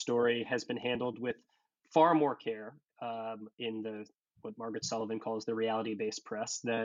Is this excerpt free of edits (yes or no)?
yes